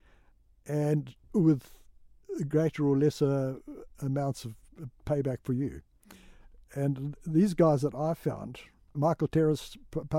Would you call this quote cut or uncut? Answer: uncut